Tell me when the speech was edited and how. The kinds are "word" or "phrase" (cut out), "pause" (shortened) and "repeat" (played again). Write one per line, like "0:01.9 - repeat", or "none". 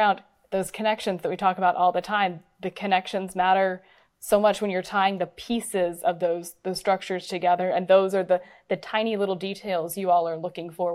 none